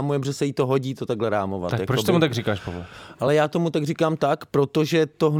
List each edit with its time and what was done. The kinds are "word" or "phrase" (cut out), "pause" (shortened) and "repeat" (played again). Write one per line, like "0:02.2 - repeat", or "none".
none